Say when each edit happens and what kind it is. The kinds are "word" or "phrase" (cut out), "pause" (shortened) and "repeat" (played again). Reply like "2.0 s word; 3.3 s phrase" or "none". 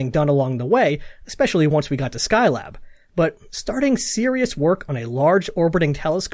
none